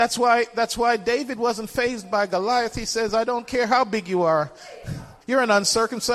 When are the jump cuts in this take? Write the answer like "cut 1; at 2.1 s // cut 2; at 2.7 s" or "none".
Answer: cut 1; at 5.2 s